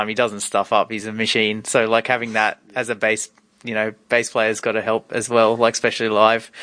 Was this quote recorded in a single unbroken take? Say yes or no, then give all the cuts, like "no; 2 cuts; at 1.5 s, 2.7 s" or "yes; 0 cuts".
yes; 0 cuts